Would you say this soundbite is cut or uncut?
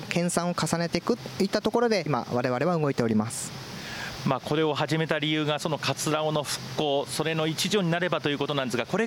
cut